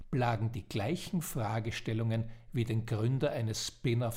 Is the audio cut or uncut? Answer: uncut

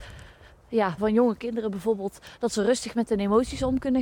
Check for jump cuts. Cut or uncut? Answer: cut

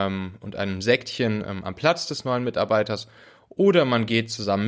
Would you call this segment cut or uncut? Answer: uncut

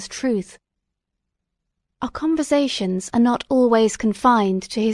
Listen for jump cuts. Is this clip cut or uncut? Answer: uncut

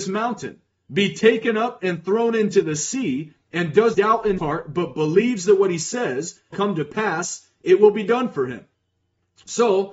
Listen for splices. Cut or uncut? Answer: cut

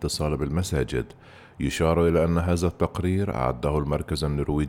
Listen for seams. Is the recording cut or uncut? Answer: uncut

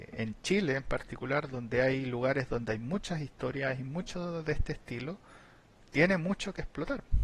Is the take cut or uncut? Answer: uncut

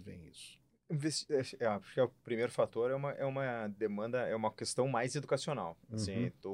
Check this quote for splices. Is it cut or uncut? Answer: uncut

